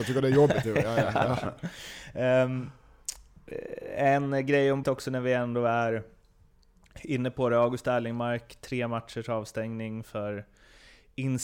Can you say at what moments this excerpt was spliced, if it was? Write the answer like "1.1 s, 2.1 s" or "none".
4.8 s